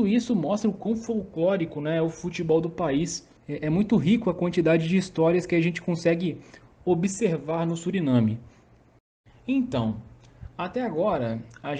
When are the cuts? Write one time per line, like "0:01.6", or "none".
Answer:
0:03.4